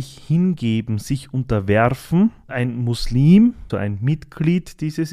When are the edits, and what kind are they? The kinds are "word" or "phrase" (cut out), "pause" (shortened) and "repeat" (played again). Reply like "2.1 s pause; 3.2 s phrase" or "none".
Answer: 2.5 s word; 3.7 s word